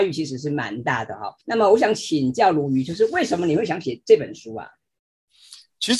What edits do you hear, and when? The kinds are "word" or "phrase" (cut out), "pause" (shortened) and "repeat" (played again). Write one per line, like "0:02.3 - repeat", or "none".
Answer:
0:01.4 - pause